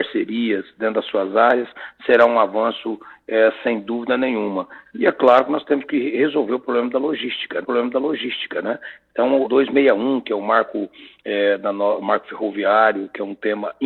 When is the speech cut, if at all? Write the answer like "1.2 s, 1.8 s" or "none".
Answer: 7.6 s, 9.4 s